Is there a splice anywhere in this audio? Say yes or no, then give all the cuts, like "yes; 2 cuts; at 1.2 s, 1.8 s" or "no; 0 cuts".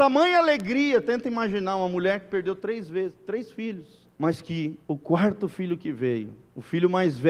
yes; 2 cuts; at 4.1 s, 4.8 s